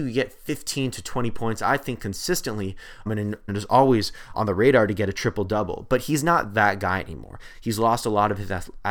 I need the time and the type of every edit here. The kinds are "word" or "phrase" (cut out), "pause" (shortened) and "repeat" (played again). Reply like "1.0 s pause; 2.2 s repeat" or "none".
3.1 s word; 3.5 s word; 4.3 s word